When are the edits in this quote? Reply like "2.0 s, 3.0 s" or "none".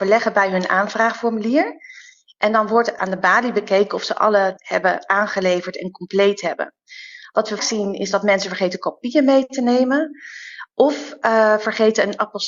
4.6 s, 7.6 s